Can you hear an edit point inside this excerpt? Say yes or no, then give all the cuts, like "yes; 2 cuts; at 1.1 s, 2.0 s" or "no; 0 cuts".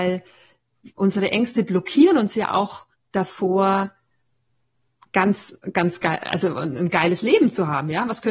yes; 1 cut; at 2.9 s